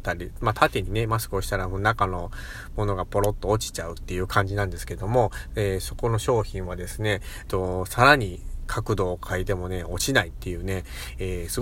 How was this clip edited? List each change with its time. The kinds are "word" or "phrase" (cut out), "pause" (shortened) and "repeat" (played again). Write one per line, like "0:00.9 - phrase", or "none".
0:07.5 - phrase